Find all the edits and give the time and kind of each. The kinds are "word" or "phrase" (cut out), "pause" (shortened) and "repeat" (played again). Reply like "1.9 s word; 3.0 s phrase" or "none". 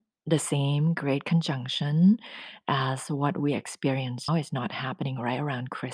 4.3 s word